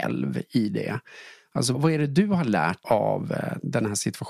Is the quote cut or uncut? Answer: cut